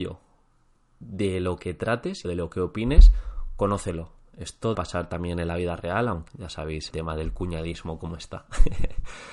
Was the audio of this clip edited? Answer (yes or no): yes